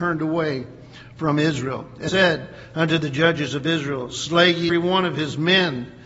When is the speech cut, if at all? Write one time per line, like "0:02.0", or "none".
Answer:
0:02.1
0:04.7